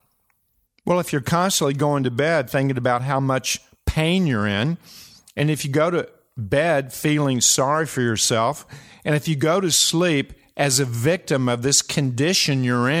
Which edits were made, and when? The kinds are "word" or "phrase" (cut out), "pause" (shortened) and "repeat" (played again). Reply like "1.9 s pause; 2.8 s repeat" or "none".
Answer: none